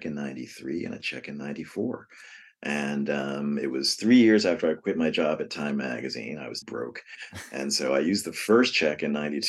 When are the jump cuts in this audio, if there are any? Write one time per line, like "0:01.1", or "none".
0:06.6